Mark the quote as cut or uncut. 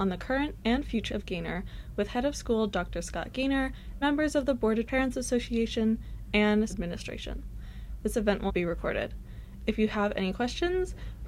cut